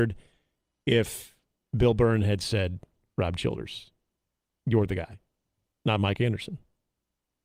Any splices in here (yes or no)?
no